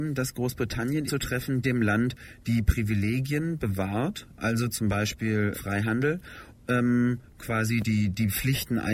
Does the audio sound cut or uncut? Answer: cut